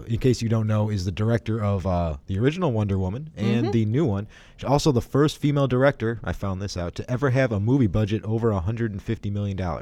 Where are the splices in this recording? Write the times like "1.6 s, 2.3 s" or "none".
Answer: none

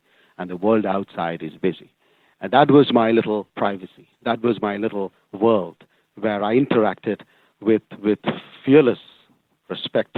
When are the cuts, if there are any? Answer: 1.6 s, 3.5 s

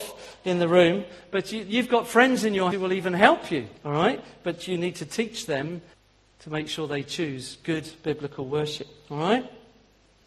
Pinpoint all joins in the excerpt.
2.7 s, 3.8 s, 5.9 s

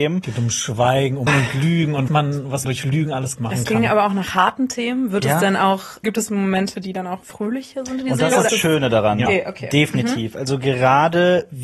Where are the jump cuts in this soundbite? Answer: 1.3 s, 2.1 s, 2.6 s, 3.4 s, 6.0 s, 7.2 s, 8.5 s, 9.3 s

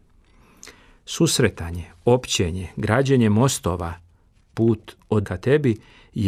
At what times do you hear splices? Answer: 5.2 s

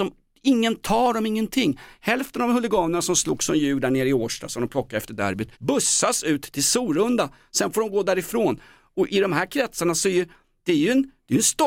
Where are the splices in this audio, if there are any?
5.5 s, 9.1 s

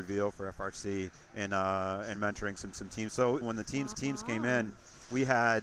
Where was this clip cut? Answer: 1.2 s, 2.2 s, 2.7 s, 3.4 s, 3.9 s

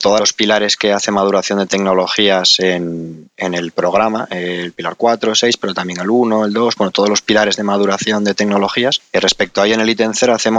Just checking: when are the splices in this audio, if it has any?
none

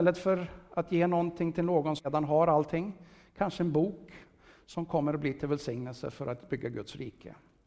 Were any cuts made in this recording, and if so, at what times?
2.0 s

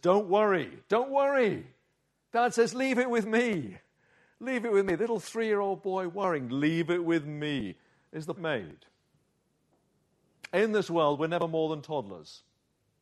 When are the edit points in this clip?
8.4 s

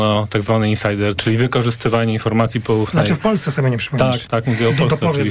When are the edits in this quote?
1.2 s, 4.3 s

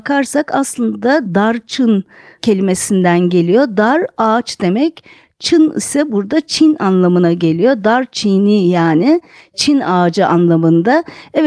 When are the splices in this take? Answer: none

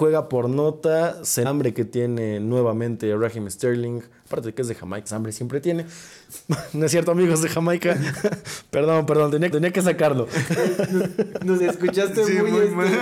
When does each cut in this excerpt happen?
1.4 s, 5.1 s, 9.5 s, 11.6 s

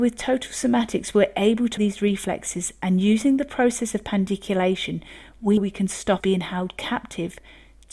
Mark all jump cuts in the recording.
1.8 s, 5.6 s, 6.2 s

